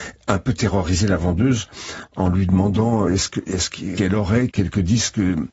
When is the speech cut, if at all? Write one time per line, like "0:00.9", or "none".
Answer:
0:03.1
0:04.0
0:04.5